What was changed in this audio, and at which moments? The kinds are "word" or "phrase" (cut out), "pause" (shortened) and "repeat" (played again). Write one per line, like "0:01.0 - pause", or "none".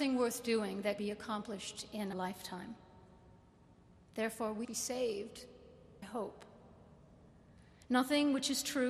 0:01.0 - word
0:02.1 - word
0:04.6 - word
0:06.0 - word